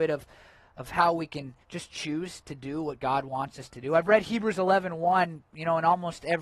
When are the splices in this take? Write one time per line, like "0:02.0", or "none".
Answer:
0:01.6